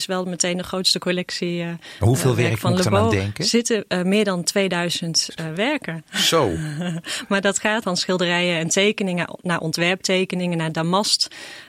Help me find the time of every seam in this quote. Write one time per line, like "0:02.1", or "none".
0:07.8